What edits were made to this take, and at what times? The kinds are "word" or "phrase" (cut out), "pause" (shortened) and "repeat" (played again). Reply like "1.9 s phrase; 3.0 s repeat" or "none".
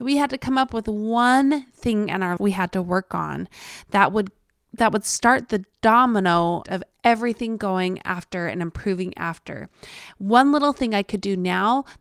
2.4 s word; 6.6 s word